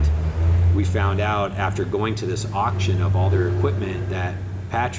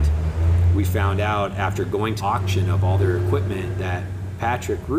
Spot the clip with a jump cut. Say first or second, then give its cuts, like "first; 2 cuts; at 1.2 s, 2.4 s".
second; 1 cut; at 2.2 s